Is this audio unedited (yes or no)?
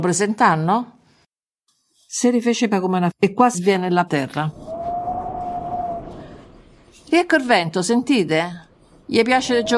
no